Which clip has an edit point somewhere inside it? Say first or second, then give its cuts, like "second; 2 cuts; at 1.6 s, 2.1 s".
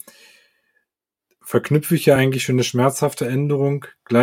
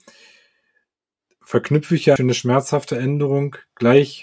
second; 1 cut; at 2.2 s